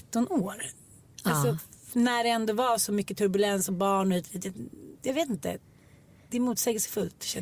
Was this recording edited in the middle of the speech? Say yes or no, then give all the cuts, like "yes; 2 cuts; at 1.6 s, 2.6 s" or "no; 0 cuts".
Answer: yes; 2 cuts; at 1.1 s, 5.0 s